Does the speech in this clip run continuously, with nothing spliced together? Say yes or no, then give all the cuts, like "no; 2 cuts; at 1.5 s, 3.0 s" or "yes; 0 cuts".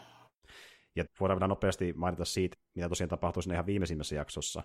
no; 2 cuts; at 1.1 s, 2.5 s